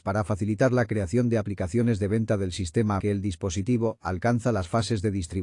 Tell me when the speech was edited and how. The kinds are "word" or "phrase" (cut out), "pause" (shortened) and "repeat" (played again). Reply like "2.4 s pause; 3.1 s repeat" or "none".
3.0 s word